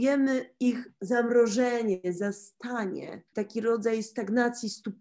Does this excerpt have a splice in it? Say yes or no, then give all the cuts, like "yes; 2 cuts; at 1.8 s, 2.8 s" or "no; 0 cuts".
yes; 1 cut; at 3.3 s